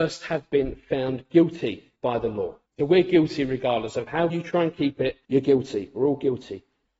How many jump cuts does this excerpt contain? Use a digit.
4